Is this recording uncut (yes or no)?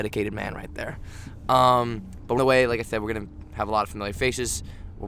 no